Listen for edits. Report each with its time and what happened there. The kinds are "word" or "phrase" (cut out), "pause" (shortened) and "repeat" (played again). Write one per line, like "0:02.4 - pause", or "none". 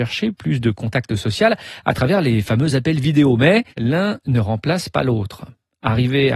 0:03.7 - pause

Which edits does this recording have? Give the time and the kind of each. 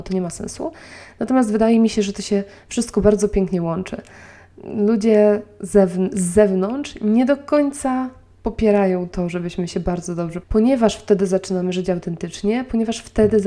0:10.4 - phrase

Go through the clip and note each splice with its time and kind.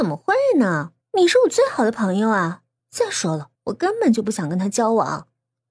0:01.0 - pause
0:02.8 - pause
0:03.6 - pause

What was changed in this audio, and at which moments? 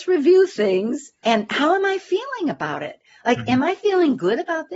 none

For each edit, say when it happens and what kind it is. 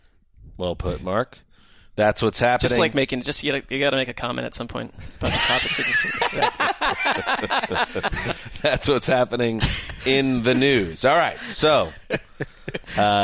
none

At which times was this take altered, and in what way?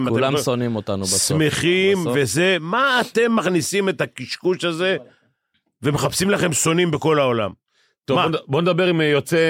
none

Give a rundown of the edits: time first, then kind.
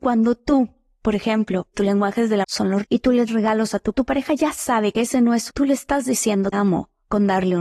0:01.7 - word
0:02.4 - word
0:02.8 - word
0:03.3 - word
0:03.9 - word
0:04.9 - word
0:05.5 - word
0:06.5 - word

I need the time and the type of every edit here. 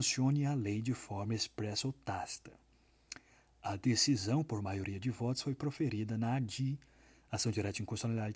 none

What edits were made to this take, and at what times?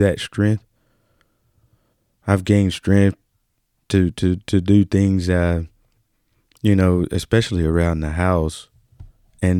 none

